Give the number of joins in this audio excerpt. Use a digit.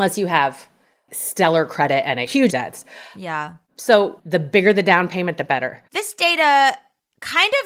3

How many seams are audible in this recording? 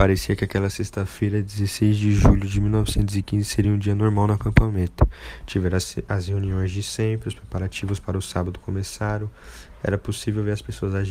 0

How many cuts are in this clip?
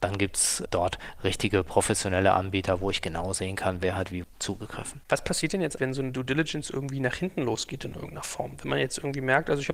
2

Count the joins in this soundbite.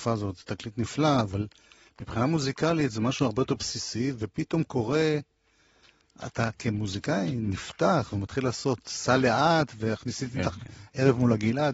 0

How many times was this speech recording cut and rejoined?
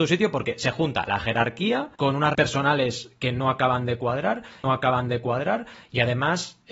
3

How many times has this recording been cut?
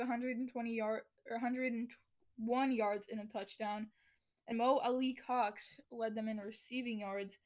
2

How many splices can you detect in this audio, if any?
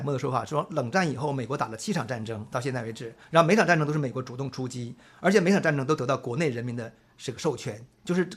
1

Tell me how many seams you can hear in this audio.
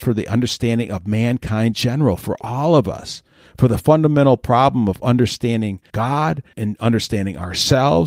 3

